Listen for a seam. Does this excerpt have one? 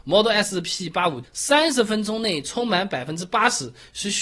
yes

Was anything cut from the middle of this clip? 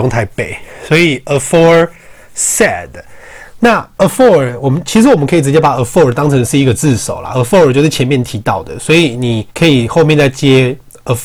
yes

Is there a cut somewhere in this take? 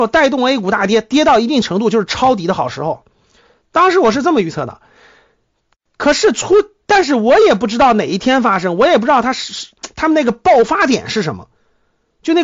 no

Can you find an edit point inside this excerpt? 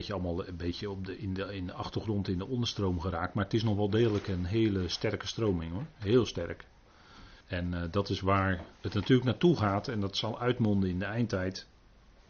yes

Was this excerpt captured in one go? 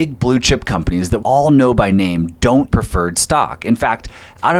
no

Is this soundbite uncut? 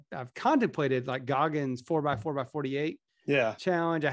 yes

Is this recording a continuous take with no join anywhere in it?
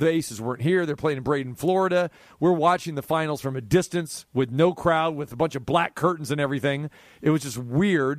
yes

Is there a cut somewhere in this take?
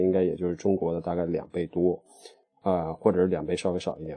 no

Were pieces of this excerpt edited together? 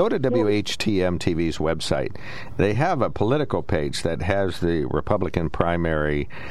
no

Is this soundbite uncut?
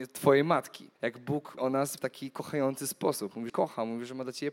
no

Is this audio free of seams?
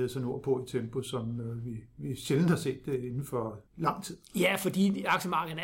no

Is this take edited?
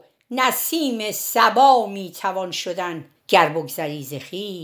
yes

